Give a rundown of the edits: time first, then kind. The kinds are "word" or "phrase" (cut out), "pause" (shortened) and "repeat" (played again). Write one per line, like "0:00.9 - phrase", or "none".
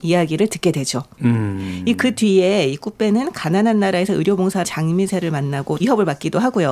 0:04.6 - phrase
0:05.8 - phrase